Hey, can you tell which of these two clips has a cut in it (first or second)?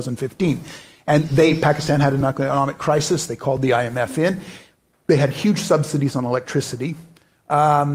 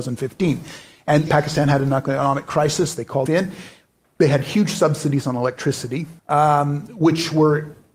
second